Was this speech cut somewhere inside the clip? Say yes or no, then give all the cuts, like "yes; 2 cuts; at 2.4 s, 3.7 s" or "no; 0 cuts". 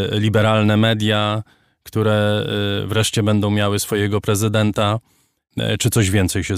no; 0 cuts